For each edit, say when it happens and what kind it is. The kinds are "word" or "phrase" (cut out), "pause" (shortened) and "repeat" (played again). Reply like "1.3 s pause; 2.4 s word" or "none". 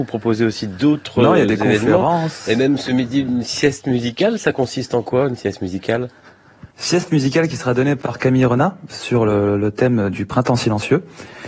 6.7 s pause